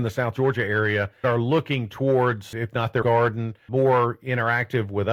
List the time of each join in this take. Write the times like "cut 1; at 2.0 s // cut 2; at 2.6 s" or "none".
cut 1; at 1.2 s // cut 2; at 2.5 s // cut 3; at 3.0 s // cut 4; at 3.7 s